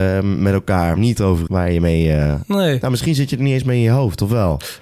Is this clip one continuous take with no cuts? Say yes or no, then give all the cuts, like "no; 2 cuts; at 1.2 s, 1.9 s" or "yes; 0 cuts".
no; 2 cuts; at 1.0 s, 1.5 s